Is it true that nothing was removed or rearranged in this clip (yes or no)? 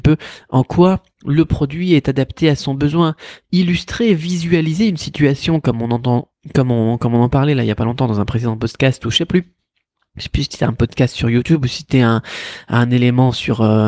yes